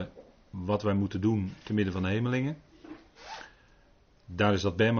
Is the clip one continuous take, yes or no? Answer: yes